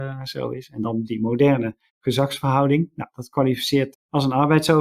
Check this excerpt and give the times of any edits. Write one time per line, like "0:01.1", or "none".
0:01.0
0:01.9
0:03.9